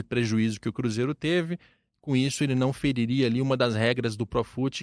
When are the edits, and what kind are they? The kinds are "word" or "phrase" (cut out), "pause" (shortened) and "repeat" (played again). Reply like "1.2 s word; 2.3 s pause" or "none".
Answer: none